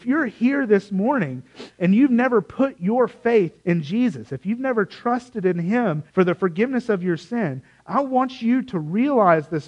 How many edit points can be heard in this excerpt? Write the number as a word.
two